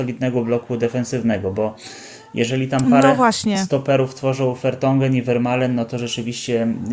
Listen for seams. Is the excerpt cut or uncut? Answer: uncut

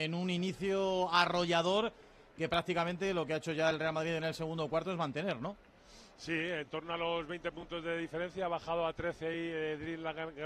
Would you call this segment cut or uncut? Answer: uncut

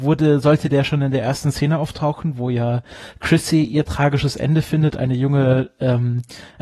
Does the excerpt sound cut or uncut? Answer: uncut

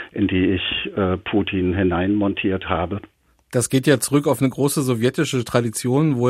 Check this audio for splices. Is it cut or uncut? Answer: uncut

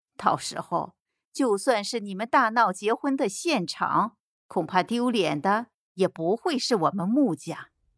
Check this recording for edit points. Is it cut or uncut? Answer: uncut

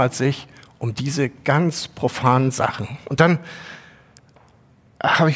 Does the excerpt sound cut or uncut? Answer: uncut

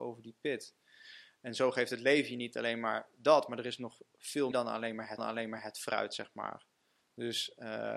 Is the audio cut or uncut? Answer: cut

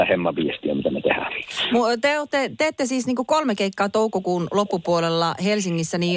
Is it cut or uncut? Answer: uncut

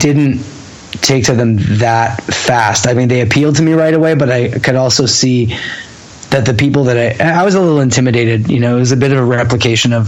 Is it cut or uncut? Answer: cut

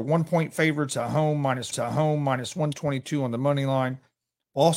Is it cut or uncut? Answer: cut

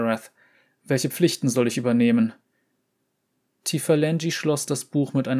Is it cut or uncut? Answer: uncut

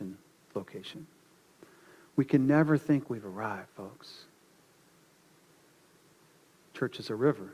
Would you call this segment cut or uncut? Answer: uncut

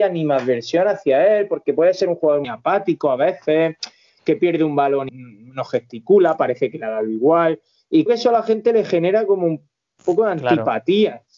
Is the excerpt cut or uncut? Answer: cut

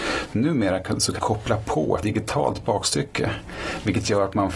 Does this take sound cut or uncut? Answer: cut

